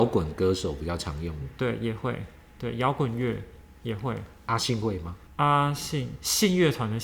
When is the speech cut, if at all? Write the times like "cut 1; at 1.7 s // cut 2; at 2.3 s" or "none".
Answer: cut 1; at 5.3 s